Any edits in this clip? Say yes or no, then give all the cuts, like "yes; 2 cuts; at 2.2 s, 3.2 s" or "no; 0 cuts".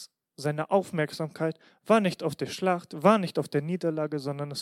no; 0 cuts